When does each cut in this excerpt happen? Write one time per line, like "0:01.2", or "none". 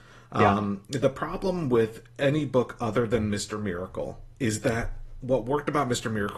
0:04.3

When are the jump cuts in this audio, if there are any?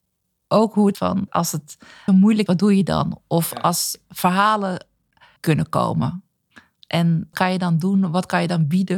0:00.9
0:01.3
0:02.1
0:02.5
0:05.4
0:07.3

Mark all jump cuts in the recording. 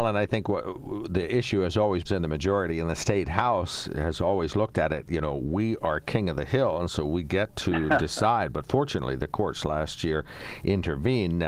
0:02.1

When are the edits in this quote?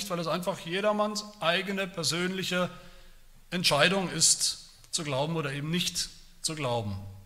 none

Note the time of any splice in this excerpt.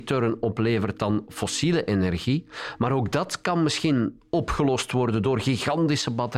none

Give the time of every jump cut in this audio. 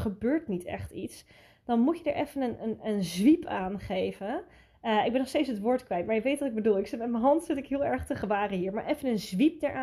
none

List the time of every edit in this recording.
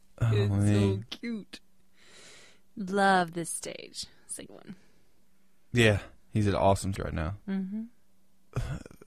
0:04.5
0:06.2
0:07.0

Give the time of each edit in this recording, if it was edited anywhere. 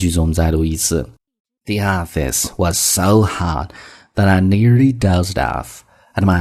none

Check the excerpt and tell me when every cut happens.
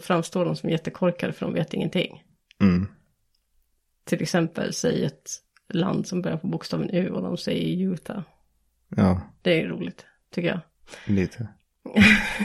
none

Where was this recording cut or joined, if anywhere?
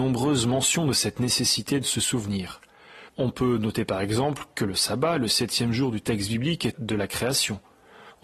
0:03.1
0:06.7

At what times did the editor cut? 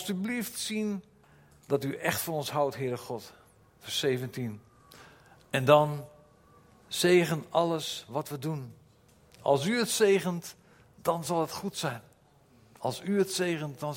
none

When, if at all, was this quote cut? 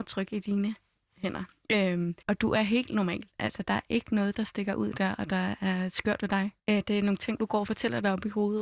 0:02.2
0:06.6

